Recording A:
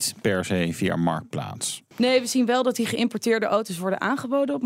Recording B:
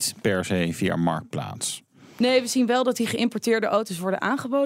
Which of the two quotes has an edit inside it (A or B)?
A